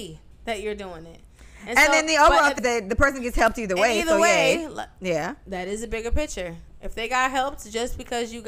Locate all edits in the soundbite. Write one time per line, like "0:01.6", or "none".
0:02.6